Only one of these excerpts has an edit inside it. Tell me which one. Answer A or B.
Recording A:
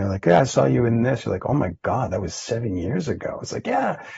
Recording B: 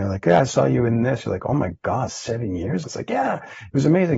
B